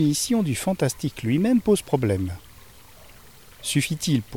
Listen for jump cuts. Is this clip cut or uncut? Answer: uncut